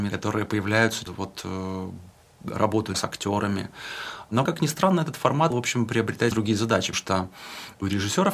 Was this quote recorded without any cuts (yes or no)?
no